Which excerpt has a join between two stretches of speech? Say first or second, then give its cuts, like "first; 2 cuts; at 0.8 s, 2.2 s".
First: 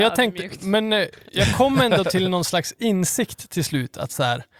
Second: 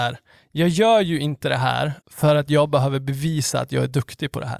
second; 1 cut; at 2.0 s